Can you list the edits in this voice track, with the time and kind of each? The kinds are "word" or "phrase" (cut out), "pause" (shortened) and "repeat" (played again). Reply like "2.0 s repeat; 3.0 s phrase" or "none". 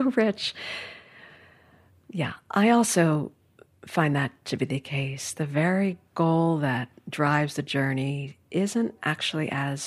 none